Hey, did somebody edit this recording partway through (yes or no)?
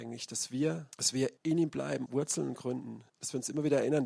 yes